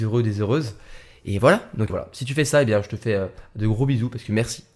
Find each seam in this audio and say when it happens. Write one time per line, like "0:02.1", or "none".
0:01.9